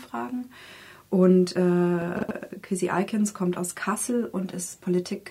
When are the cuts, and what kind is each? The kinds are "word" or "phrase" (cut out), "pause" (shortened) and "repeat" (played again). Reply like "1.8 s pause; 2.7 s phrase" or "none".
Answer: none